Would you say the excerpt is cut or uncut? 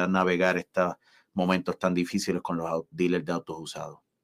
uncut